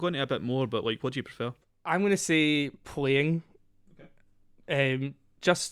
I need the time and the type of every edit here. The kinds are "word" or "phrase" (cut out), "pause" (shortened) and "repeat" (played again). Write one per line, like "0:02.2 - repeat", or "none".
0:01.6 - pause

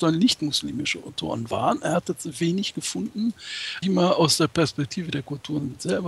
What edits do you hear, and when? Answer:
0:02.0 - word
0:03.8 - word

